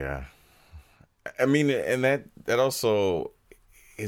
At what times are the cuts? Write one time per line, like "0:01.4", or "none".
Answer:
none